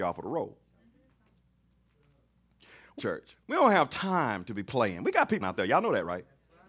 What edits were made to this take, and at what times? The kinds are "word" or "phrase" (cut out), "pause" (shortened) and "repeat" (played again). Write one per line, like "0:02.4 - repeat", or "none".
0:03.0 - phrase
0:03.4 - pause
0:05.4 - word